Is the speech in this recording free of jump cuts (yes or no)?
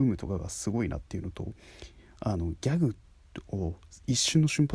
yes